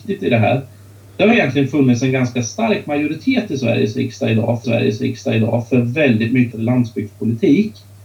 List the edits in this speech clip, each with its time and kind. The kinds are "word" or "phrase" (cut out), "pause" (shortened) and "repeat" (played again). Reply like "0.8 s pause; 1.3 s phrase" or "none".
4.6 s repeat; 6.5 s word